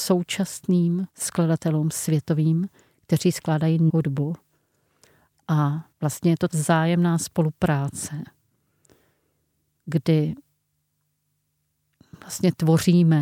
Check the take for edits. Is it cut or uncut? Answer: cut